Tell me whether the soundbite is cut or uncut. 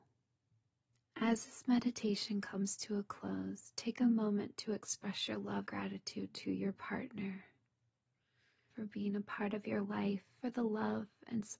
cut